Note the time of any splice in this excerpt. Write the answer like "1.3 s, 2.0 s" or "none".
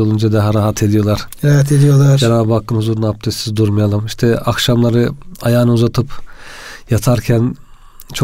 none